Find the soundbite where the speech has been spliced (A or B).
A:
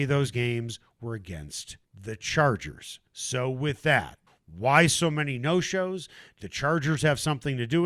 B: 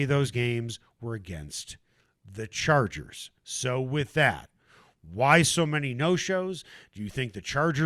A